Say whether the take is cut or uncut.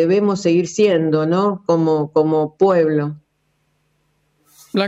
uncut